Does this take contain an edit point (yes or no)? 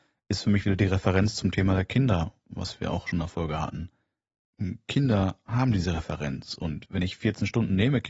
no